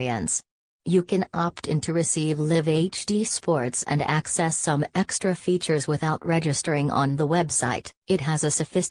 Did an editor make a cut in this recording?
yes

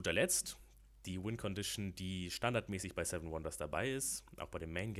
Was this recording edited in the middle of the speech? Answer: no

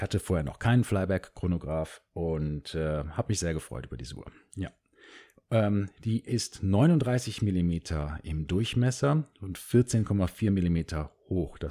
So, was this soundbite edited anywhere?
no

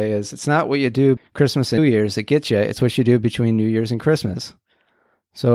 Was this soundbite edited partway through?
yes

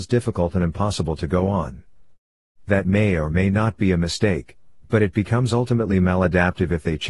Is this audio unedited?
yes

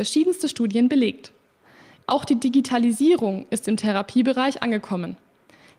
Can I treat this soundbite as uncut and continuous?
yes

